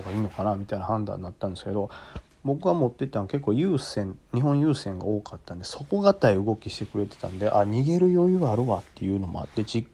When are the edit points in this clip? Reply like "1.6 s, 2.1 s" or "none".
4.2 s